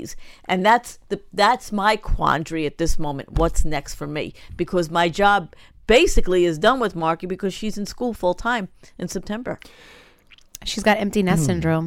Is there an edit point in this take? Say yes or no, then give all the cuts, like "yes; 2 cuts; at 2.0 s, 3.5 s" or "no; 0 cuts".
no; 0 cuts